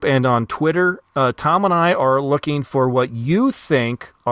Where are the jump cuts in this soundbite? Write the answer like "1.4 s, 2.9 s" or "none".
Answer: none